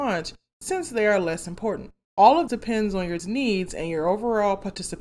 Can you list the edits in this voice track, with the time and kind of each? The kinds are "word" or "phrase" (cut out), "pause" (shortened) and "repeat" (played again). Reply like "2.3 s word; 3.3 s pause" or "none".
2.0 s pause; 2.5 s word; 3.2 s word